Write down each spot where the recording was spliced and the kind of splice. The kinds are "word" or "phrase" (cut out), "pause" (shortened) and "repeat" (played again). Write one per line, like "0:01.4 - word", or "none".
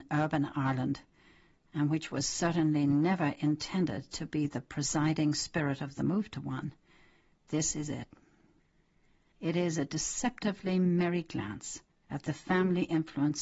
0:11.9 - pause